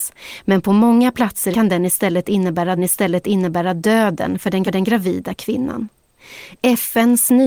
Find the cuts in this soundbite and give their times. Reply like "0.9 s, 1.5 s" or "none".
1.5 s, 2.8 s, 4.6 s